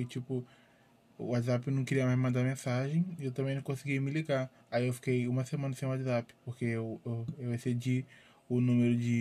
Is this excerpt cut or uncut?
cut